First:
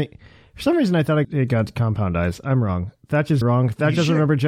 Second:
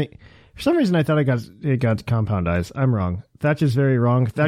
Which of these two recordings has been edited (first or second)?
first